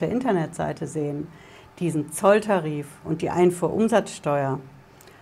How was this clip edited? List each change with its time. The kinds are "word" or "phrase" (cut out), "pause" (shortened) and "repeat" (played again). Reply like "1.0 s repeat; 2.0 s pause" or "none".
none